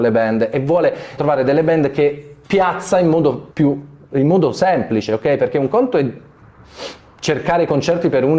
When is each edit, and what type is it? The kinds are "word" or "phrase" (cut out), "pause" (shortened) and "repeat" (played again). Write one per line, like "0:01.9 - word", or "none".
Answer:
0:01.2 - word
0:02.4 - pause
0:03.5 - pause